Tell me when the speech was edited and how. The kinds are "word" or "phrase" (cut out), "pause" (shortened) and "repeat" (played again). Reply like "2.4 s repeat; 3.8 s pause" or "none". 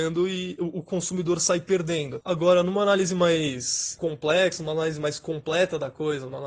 none